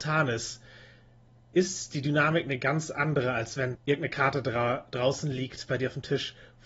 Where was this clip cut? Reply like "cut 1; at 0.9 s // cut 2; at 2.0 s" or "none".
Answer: cut 1; at 3.7 s

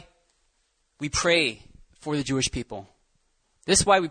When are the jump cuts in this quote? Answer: none

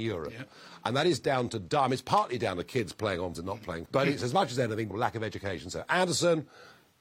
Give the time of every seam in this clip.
cut 1; at 3.3 s // cut 2; at 3.9 s // cut 3; at 4.9 s

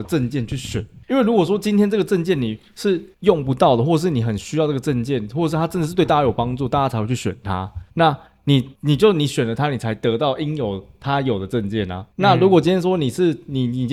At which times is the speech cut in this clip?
cut 1; at 1.0 s // cut 2; at 3.1 s // cut 3; at 7.9 s // cut 4; at 8.8 s // cut 5; at 12.1 s

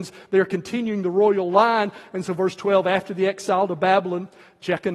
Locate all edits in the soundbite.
none

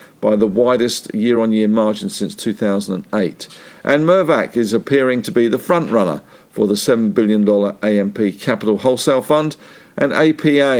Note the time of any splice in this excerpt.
none

